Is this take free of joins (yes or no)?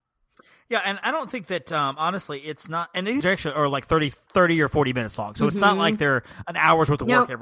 no